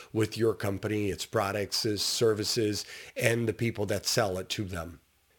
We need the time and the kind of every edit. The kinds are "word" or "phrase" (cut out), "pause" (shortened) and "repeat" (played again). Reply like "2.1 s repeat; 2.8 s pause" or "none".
none